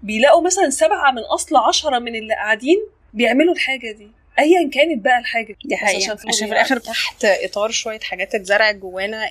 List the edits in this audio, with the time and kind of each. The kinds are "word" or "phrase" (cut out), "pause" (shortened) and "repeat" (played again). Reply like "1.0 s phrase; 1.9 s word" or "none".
5.5 s word; 6.8 s word